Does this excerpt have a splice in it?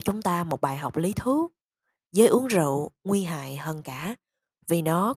no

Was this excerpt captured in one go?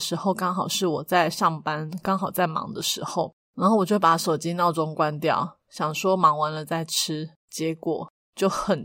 no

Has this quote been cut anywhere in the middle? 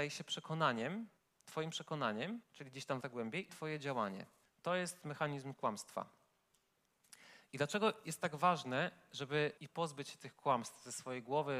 yes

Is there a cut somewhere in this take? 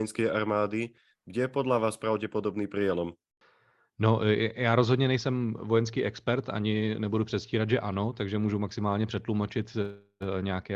no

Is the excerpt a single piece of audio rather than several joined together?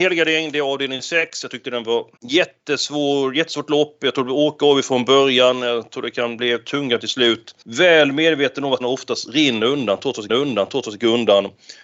no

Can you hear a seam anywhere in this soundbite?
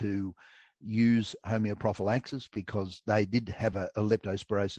no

